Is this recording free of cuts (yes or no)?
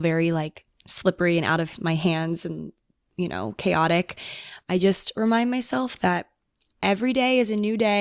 yes